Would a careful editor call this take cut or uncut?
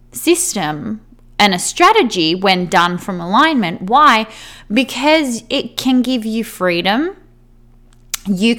uncut